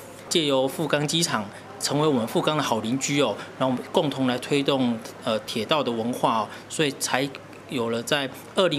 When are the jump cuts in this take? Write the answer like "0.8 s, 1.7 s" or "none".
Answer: 1.8 s